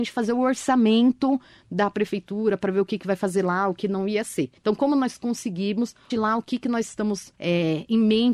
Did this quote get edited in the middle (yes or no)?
yes